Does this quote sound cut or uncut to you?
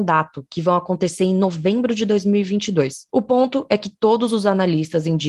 uncut